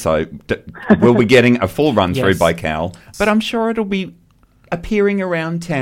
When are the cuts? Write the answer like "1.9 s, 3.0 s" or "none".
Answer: 3.0 s